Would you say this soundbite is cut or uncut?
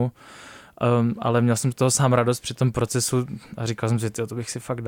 uncut